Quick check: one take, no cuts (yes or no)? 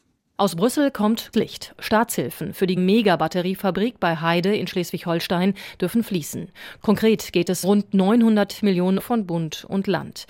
no